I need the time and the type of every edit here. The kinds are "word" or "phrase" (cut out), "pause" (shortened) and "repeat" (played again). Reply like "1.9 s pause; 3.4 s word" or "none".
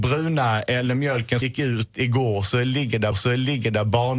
1.4 s word; 3.1 s repeat